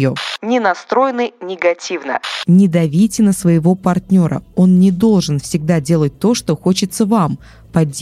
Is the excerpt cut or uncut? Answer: uncut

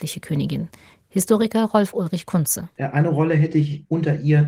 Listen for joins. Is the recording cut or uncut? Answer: uncut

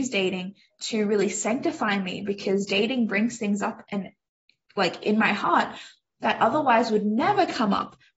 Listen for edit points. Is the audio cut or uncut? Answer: uncut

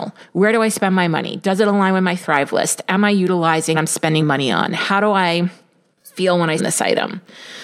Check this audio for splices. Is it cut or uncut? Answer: cut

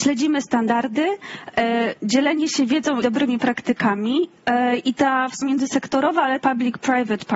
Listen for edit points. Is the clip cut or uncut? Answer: cut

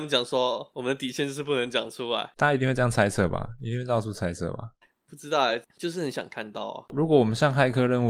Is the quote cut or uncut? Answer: uncut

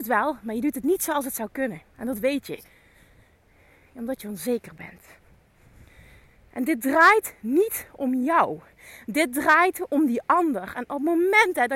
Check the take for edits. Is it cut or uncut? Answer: uncut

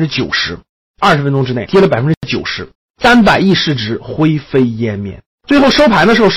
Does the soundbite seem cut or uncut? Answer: cut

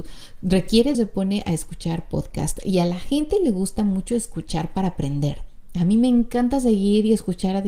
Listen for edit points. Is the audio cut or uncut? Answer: cut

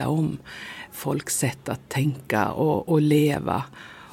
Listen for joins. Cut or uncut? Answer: uncut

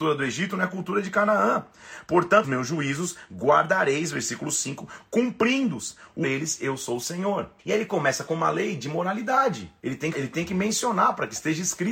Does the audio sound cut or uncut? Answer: cut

